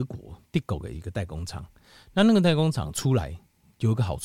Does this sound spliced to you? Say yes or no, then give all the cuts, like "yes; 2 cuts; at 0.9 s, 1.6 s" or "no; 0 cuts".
no; 0 cuts